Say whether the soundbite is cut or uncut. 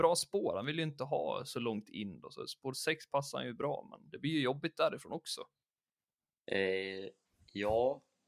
uncut